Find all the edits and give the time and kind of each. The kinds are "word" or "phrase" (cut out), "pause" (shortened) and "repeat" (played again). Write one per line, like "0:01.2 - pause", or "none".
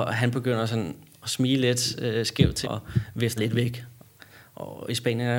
0:02.6 - word
0:03.4 - word